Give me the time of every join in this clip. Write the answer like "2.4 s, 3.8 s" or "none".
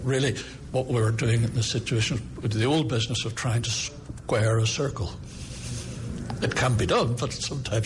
none